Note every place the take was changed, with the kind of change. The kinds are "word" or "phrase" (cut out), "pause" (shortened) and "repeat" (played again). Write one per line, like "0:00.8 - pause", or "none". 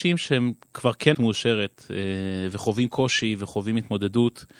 0:01.1 - word